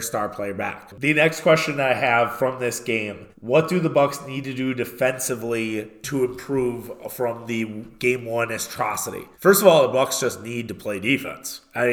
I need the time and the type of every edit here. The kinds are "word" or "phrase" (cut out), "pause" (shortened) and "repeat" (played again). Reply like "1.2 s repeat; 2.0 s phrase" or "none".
3.3 s pause; 9.3 s pause